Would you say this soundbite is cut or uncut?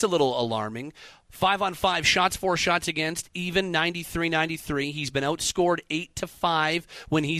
uncut